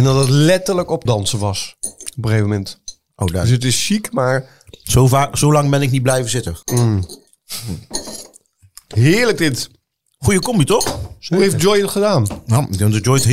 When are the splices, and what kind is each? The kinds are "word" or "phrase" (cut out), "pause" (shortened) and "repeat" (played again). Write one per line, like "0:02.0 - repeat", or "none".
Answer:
0:01.1 - word
0:06.6 - pause
0:09.9 - pause